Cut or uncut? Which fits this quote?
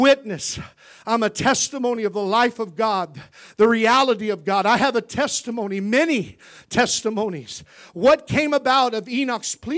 uncut